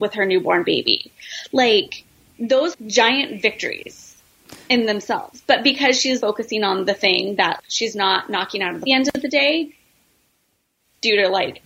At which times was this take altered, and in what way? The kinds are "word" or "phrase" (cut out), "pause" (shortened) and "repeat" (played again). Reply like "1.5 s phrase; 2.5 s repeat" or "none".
2.7 s phrase; 6.2 s word; 7.6 s word; 8.9 s phrase